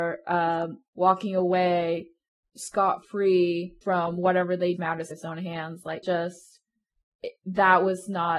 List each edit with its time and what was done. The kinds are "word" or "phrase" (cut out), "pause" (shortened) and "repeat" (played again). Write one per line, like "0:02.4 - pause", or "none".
0:02.4 - word
0:03.8 - pause
0:04.8 - phrase
0:05.1 - word
0:06.0 - word
0:06.9 - pause